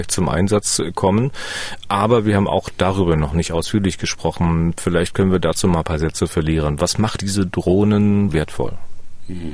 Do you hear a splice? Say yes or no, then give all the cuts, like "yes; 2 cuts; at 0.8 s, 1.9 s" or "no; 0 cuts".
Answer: yes; 2 cuts; at 7.2 s, 8.3 s